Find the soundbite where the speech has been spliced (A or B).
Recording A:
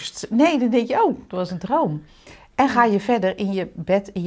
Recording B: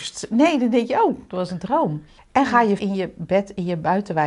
B